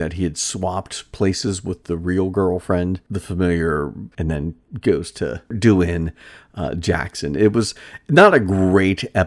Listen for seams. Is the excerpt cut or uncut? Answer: cut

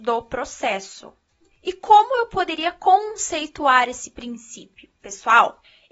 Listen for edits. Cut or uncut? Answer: uncut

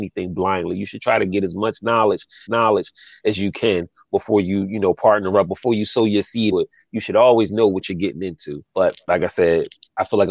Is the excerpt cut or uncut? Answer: cut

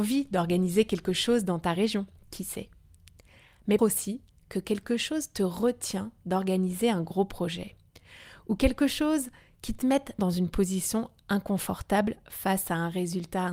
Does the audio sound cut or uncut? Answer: cut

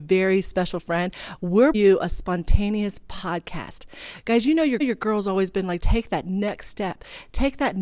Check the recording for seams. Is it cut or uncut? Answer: cut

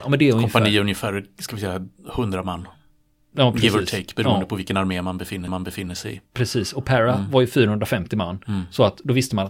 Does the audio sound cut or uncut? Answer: cut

